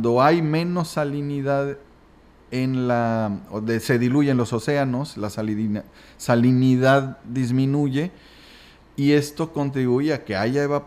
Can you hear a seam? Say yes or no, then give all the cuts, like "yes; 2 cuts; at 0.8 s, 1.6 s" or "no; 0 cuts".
no; 0 cuts